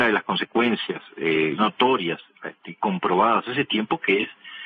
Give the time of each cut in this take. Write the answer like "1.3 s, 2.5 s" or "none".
1.6 s